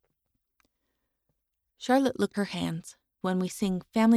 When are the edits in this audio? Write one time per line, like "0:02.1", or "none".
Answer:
0:02.3
0:03.2